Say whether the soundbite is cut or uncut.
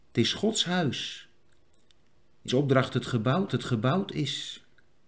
cut